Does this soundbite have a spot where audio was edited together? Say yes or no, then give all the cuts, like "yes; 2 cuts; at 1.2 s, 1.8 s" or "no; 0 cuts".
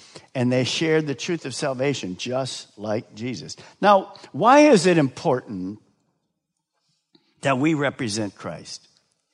no; 0 cuts